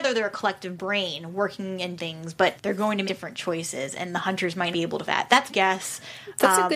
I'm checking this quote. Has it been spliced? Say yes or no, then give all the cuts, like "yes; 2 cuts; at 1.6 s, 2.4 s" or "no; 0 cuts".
yes; 6 cuts; at 2.0 s, 2.6 s, 3.1 s, 4.7 s, 5.1 s, 5.5 s